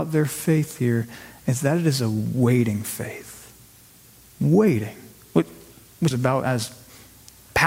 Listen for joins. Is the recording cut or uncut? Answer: cut